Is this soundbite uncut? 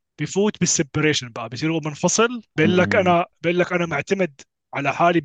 no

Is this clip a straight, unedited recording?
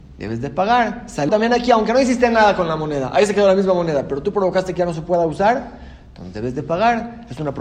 no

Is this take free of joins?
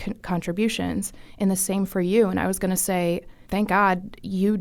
no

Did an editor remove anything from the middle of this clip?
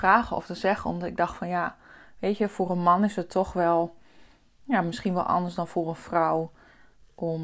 no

